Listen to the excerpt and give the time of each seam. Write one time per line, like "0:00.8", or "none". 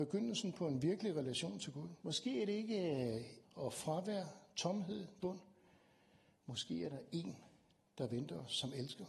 0:02.0
0:03.4
0:05.2